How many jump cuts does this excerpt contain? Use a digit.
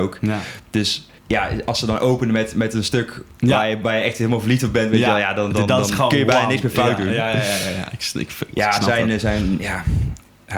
1